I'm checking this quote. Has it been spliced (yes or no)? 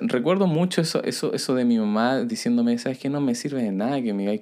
no